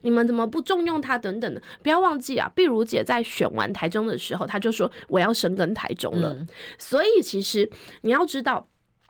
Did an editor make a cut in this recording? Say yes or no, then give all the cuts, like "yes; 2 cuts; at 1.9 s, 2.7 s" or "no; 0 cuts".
no; 0 cuts